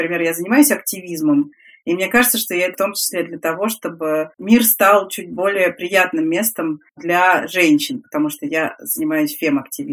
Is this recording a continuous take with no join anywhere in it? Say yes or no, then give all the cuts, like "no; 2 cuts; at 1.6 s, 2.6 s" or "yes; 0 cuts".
no; 3 cuts; at 2.7 s, 4.3 s, 6.9 s